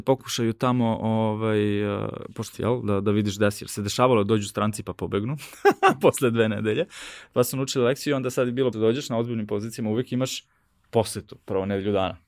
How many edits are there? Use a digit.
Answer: 2